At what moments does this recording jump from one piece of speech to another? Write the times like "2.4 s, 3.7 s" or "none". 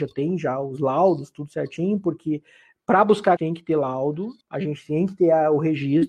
3.4 s, 4.4 s